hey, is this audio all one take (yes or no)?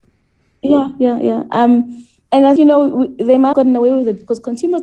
no